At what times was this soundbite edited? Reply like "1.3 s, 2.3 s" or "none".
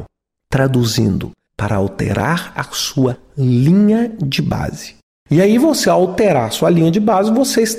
5.0 s